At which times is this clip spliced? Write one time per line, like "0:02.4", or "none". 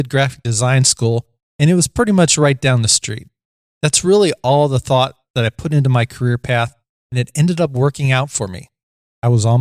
none